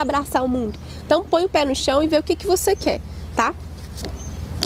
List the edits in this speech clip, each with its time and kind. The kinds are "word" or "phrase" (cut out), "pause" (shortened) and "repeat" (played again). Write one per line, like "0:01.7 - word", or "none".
none